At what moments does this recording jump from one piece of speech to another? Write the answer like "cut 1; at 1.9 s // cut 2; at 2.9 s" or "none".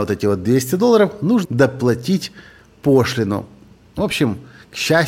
cut 1; at 1.4 s